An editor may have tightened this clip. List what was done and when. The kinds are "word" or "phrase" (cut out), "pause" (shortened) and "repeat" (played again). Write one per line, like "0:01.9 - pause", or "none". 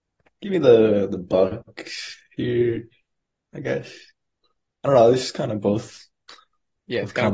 none